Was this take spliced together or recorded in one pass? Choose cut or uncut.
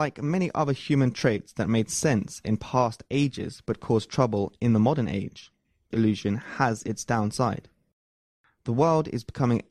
cut